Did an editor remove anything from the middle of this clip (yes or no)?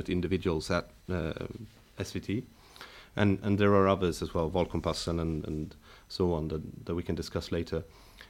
no